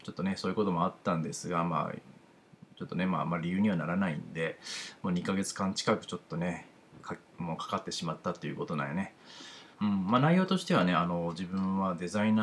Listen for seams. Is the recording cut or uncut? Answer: cut